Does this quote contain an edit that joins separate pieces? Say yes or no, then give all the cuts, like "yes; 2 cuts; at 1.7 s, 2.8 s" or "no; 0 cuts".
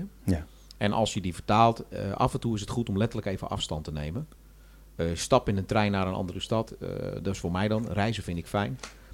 no; 0 cuts